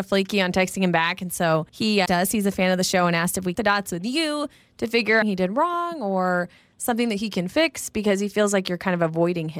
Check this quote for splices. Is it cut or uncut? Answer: cut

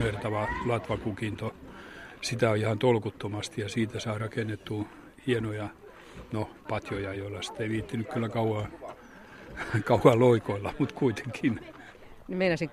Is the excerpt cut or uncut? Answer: uncut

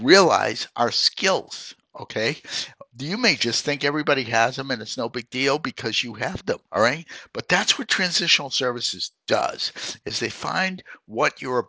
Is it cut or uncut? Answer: cut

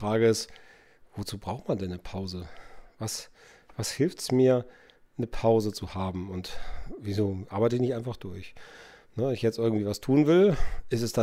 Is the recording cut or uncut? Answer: uncut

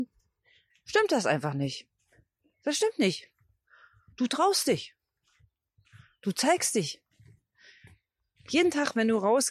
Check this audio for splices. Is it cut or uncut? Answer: uncut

